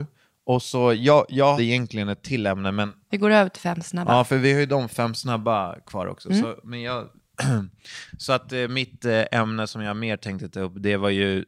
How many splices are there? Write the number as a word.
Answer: one